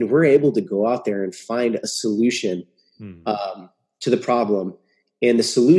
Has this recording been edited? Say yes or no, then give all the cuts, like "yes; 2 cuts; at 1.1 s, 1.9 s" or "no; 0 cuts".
no; 0 cuts